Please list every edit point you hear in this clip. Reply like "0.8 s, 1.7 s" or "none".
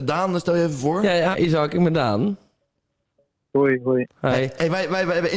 1.3 s